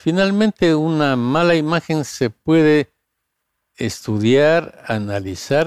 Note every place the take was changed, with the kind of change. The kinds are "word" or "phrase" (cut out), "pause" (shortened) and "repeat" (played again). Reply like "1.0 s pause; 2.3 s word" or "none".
none